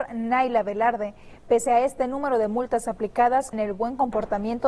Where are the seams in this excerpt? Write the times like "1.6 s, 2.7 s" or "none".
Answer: 3.5 s